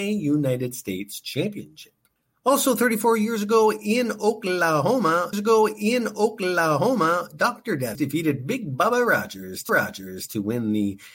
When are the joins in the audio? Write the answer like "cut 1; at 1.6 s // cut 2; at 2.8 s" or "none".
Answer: cut 1; at 2.2 s // cut 2; at 5.3 s // cut 3; at 7.9 s // cut 4; at 9.7 s